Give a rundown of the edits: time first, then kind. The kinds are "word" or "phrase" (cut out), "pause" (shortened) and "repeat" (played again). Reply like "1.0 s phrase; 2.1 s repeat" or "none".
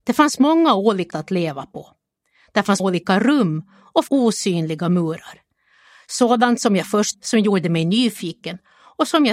1.1 s word; 2.8 s word; 4.1 s word; 7.1 s word

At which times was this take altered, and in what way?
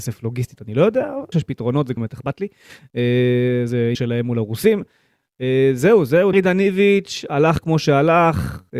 1.3 s word; 2.0 s word; 3.9 s word; 6.3 s word

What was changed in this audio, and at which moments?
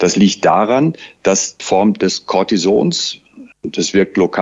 1.6 s word; 3.5 s pause

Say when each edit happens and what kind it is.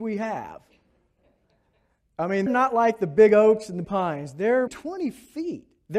2.5 s word; 3.8 s word; 4.7 s word

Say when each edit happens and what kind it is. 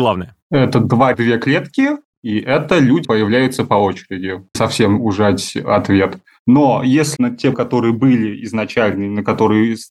1.1 s word; 3.0 s word; 4.5 s word; 7.2 s word; 7.5 s word

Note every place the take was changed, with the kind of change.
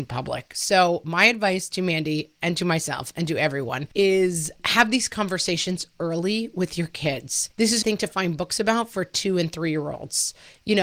7.8 s phrase

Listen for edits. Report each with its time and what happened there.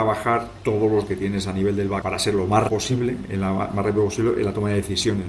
1.0 s word; 2.0 s word; 2.7 s word

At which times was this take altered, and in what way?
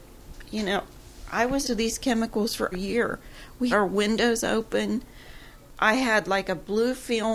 1.6 s word; 2.7 s word; 3.7 s word

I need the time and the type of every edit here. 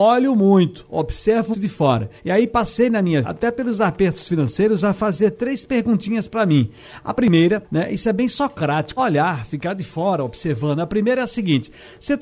1.5 s word; 2.2 s pause; 3.2 s word; 7.6 s pause; 9.0 s phrase

